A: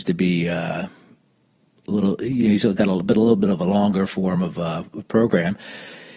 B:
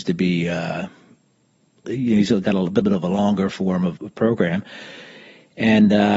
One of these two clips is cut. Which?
B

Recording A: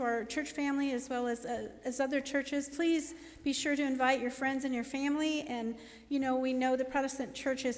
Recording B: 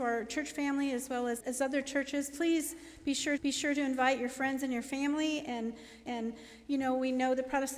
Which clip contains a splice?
B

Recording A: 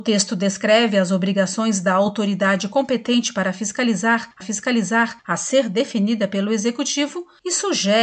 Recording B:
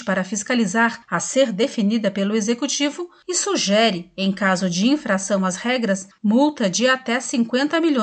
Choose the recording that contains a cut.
A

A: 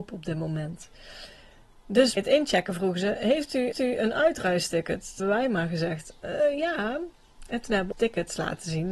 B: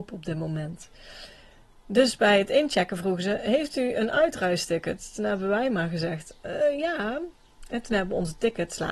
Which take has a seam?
A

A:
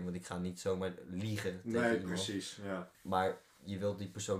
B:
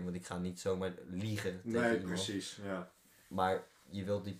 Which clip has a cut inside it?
A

